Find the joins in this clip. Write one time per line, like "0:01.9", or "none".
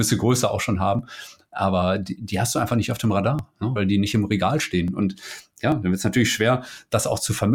0:03.8